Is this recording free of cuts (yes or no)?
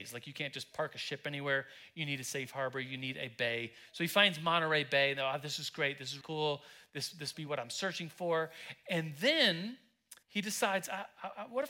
no